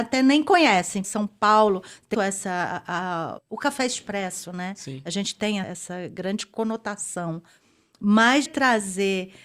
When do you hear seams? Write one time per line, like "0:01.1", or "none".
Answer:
0:01.0
0:02.1
0:03.4
0:05.6
0:08.5